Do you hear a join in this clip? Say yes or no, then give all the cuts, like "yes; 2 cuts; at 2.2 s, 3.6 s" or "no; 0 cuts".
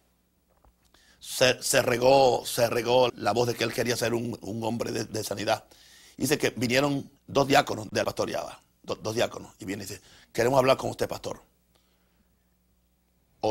yes; 3 cuts; at 3.1 s, 7.2 s, 8.0 s